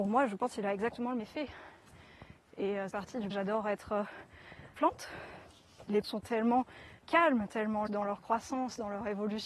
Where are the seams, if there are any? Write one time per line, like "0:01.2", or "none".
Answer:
0:01.2
0:02.9
0:03.3
0:04.7
0:06.0
0:07.0
0:07.9